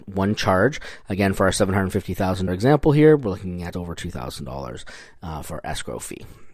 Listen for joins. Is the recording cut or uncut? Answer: cut